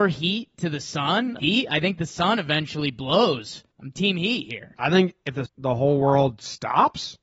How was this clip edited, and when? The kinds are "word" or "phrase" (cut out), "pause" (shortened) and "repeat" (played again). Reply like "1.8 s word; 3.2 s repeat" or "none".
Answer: 1.4 s word; 3.7 s pause; 5.5 s phrase